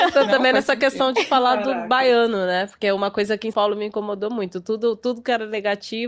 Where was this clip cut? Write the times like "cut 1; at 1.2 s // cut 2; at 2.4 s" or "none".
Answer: cut 1; at 3.5 s